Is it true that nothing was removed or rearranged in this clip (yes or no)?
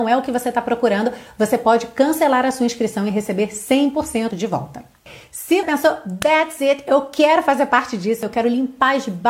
no